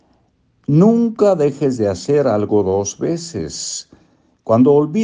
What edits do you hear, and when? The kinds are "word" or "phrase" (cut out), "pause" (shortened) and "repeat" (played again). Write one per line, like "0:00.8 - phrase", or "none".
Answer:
none